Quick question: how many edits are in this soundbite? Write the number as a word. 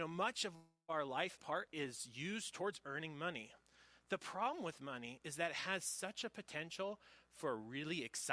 one